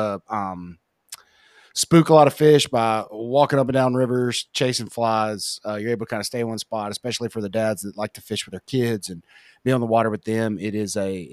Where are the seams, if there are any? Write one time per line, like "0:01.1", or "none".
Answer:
none